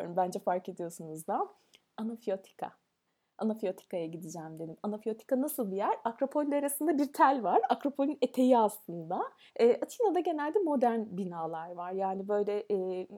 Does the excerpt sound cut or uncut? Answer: cut